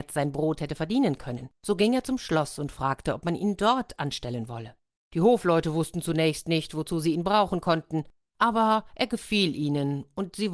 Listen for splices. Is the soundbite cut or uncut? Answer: cut